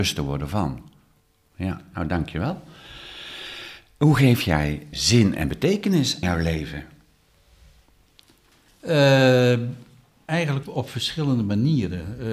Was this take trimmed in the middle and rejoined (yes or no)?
yes